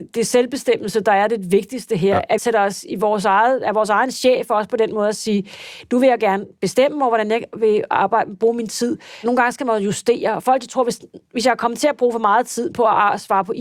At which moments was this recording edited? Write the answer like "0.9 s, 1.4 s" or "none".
2.4 s